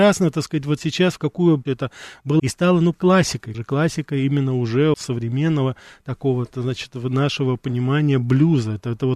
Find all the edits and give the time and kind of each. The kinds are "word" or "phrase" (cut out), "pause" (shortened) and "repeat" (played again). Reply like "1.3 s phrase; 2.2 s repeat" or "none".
1.7 s phrase; 2.4 s word; 2.9 s word; 3.5 s word; 4.9 s word